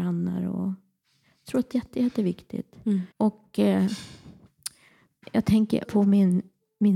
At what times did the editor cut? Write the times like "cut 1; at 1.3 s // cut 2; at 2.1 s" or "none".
cut 1; at 1.7 s // cut 2; at 3.1 s // cut 3; at 5.2 s // cut 4; at 5.8 s